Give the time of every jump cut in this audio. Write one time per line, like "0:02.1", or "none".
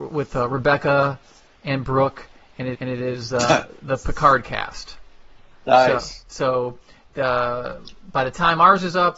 0:02.7

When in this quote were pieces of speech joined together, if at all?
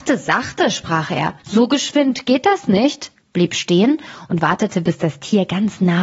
0:01.4
0:03.2

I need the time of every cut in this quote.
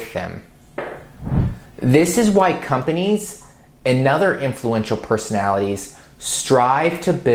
none

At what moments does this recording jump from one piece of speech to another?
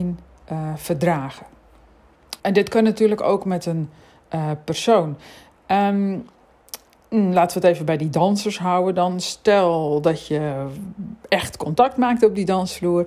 0:02.4
0:07.0

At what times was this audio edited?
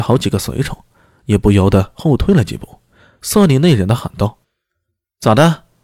0:04.4

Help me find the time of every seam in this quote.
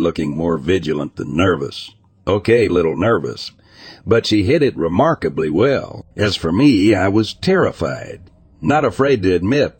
0:02.7
0:06.1

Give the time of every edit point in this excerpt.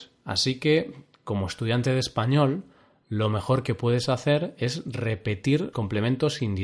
0:05.7

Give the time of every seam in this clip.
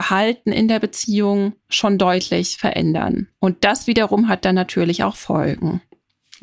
0:01.6

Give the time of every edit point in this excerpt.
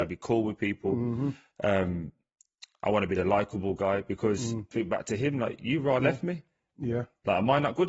0:04.7

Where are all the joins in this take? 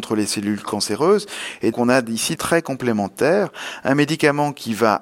0:01.7
0:02.3

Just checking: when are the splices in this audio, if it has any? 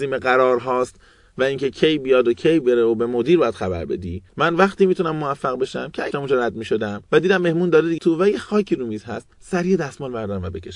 0:01.7
0:04.3
0:06.1
0:07.1
0:08.0
0:09.3

